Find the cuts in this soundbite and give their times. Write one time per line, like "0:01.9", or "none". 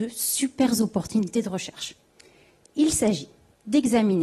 none